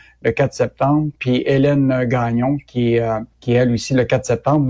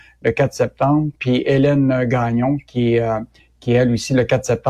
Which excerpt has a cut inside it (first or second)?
first